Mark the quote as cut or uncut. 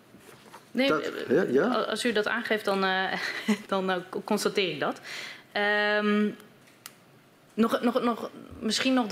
cut